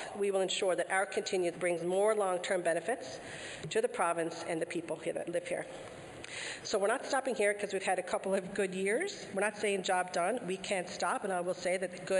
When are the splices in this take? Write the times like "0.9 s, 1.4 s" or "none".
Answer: 1.5 s